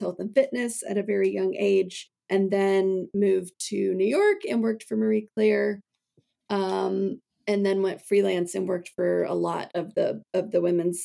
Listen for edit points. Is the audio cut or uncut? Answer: cut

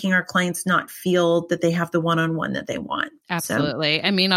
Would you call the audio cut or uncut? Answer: cut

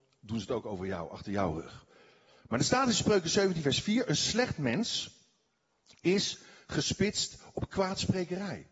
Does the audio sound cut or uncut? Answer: uncut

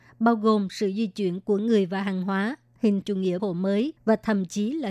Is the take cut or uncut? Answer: cut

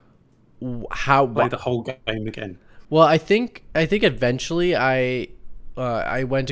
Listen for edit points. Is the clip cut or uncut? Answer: uncut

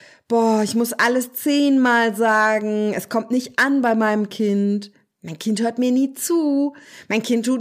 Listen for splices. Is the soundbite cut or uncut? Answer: uncut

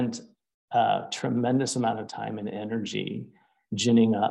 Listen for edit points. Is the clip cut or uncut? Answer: uncut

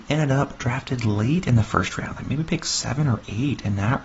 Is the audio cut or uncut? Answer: uncut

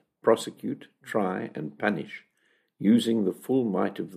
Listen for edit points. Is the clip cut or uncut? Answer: uncut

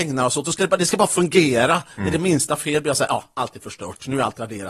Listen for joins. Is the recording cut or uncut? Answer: uncut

